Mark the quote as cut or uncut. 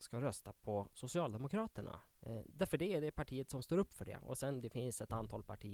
cut